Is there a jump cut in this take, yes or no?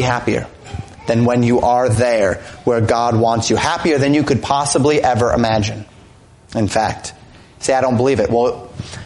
no